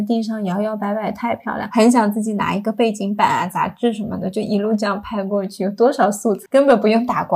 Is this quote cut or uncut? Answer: cut